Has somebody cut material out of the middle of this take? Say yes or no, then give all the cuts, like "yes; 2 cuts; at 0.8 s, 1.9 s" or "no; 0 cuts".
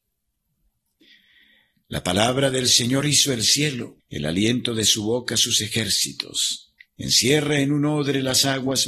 yes; 2 cuts; at 4.0 s, 6.8 s